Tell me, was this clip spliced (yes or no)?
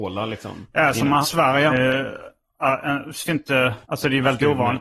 yes